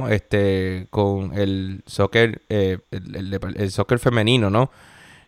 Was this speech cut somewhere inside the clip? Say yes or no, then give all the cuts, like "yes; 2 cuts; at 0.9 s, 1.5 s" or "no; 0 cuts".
yes; 1 cut; at 2.8 s